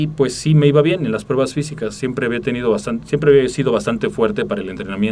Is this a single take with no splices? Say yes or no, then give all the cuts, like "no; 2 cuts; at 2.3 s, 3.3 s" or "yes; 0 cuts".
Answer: yes; 0 cuts